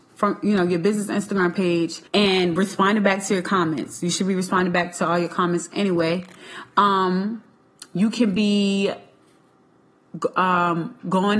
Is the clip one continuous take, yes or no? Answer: no